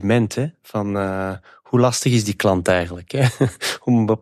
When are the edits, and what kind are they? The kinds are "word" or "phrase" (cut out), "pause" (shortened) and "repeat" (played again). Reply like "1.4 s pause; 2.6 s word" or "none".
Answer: none